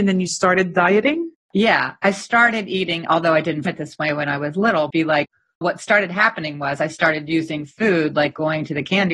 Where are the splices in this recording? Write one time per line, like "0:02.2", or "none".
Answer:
0:01.3
0:03.6
0:04.9
0:05.6